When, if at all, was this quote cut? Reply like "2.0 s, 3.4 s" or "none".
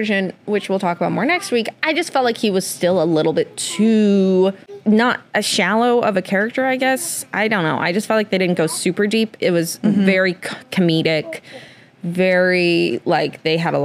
none